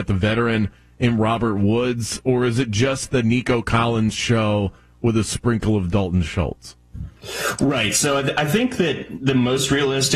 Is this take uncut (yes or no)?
yes